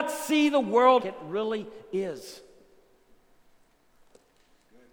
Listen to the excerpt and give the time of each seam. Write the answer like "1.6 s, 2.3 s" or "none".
1.0 s